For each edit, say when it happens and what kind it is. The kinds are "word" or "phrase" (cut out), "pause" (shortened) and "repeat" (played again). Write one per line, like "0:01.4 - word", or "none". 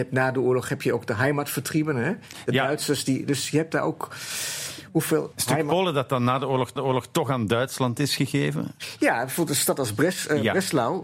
0:05.3 - word
0:06.8 - repeat